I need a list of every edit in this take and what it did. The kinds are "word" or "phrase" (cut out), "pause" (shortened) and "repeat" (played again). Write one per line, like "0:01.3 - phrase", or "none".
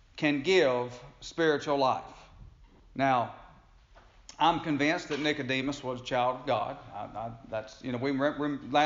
0:02.8 - pause